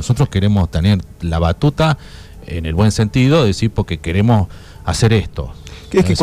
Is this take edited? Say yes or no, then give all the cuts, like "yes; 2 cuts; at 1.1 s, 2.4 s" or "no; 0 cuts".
no; 0 cuts